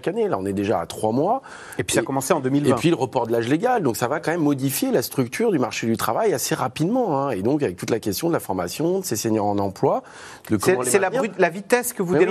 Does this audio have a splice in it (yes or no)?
no